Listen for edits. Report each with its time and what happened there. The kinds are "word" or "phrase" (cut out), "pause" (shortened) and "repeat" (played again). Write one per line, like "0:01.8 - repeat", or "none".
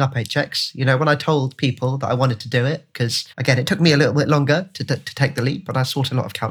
0:03.3 - pause